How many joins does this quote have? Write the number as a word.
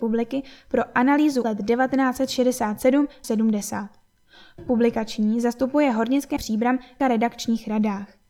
five